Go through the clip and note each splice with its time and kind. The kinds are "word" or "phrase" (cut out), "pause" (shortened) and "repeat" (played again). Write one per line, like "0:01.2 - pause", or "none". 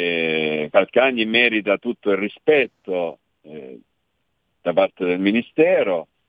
none